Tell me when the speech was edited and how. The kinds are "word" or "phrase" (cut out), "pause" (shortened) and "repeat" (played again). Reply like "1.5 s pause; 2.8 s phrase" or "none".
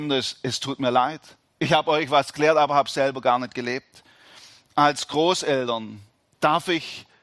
none